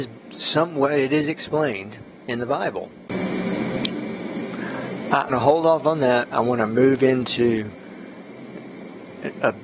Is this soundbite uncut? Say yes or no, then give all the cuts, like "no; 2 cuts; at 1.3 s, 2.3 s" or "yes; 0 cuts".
no; 1 cut; at 5.3 s